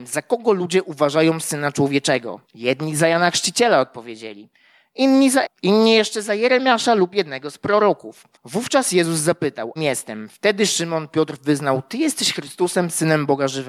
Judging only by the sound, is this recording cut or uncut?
cut